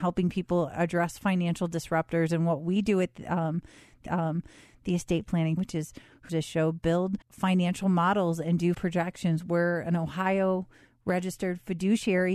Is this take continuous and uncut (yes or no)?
no